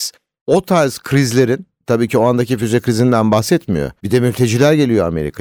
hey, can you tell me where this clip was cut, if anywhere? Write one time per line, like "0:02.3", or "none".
0:04.0